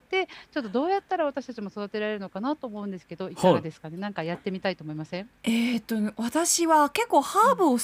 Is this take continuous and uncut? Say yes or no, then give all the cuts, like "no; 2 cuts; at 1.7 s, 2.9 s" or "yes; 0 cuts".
no; 1 cut; at 5.4 s